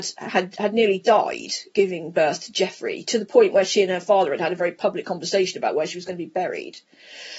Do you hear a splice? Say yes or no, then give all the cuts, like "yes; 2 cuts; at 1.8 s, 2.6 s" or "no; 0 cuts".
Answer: no; 0 cuts